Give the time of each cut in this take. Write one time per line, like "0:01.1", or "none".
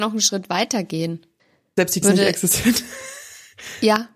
0:01.4
0:02.0